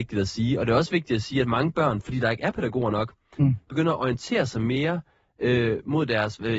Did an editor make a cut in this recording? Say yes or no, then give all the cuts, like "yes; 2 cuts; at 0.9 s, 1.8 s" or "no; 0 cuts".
no; 0 cuts